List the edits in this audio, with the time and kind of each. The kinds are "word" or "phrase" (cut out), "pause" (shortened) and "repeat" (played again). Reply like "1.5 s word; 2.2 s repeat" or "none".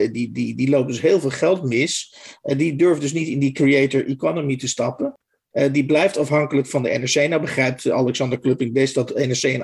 none